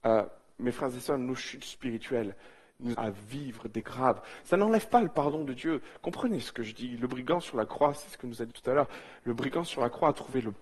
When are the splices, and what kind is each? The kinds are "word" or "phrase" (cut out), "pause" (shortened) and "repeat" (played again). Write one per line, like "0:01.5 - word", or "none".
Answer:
0:02.9 - word
0:03.8 - word
0:08.5 - word

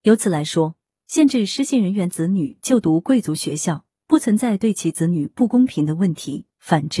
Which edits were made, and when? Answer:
none

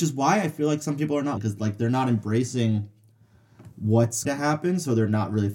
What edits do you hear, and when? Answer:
0:01.4 - word
0:04.2 - word

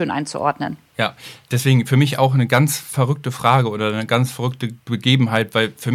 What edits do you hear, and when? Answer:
0:04.8 - pause

